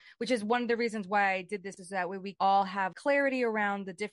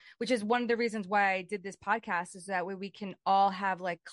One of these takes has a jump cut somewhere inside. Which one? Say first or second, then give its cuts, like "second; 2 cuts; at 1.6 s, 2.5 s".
first; 3 cuts; at 1.8 s, 2.3 s, 2.9 s